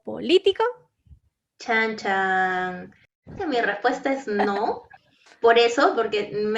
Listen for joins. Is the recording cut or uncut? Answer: cut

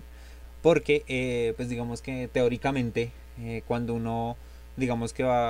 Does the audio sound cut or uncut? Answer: uncut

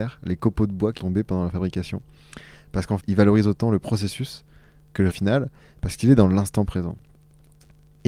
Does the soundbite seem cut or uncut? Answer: cut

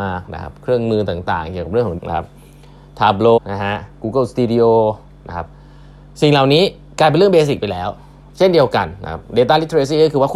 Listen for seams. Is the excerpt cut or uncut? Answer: cut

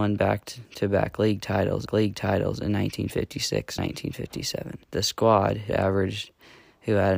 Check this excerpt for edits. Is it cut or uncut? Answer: cut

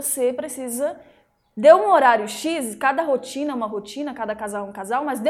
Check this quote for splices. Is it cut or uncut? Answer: uncut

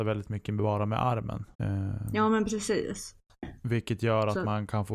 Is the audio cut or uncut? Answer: cut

